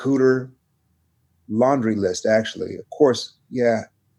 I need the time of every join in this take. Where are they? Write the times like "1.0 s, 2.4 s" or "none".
none